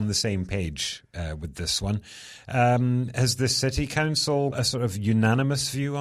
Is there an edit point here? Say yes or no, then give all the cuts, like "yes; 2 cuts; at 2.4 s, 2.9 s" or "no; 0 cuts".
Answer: yes; 1 cut; at 4.5 s